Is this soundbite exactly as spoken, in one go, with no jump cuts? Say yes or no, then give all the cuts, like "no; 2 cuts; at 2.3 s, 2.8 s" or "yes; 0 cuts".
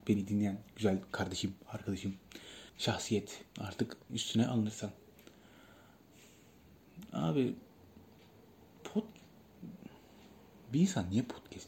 no; 2 cuts; at 2.7 s, 4.1 s